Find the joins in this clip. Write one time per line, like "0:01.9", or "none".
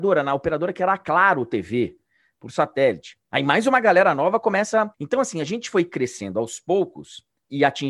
0:04.9